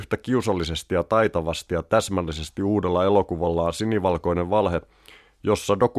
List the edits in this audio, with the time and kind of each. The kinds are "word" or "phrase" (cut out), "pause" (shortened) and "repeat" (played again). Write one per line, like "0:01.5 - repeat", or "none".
none